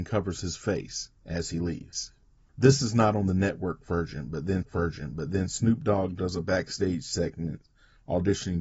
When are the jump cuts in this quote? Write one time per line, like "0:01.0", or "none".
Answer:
0:01.2
0:04.6